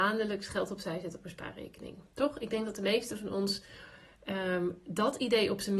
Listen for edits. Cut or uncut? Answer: uncut